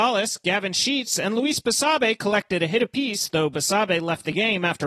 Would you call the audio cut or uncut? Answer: uncut